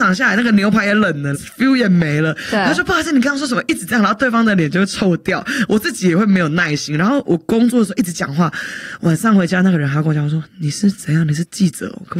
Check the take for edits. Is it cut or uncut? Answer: cut